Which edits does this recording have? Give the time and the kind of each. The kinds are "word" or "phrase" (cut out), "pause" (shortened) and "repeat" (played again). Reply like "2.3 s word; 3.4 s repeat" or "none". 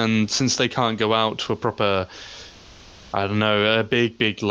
none